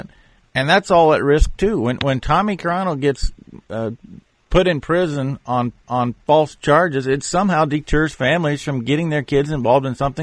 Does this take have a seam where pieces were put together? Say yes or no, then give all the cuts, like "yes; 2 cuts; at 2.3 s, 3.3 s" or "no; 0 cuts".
yes; 1 cut; at 5.8 s